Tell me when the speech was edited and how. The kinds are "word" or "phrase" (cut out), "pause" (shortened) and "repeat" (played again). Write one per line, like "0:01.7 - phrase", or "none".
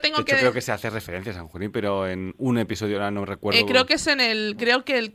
none